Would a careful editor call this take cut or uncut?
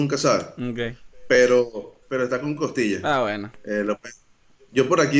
cut